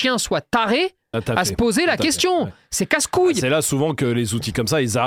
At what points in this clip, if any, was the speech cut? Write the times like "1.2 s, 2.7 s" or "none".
1.1 s

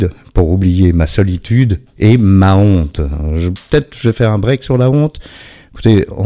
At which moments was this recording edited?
none

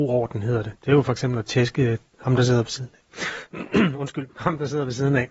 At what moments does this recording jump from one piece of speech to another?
none

